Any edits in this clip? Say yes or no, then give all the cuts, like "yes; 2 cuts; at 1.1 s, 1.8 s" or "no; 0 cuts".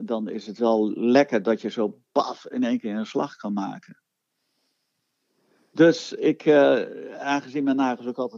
no; 0 cuts